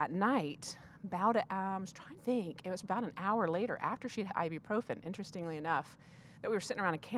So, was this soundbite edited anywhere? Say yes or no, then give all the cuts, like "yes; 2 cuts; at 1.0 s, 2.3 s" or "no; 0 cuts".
yes; 3 cuts; at 2.2 s, 2.8 s, 4.3 s